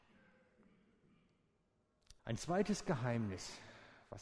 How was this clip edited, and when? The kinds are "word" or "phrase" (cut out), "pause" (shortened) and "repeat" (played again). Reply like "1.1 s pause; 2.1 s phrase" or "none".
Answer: 2.2 s pause